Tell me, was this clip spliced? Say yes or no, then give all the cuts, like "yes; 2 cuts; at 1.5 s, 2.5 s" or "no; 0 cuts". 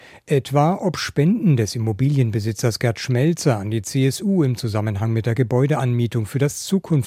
no; 0 cuts